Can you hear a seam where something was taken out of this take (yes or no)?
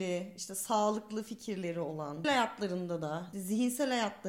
yes